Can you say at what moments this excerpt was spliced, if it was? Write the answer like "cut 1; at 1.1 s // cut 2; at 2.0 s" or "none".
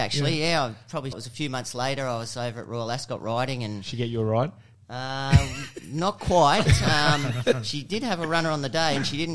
cut 1; at 1.1 s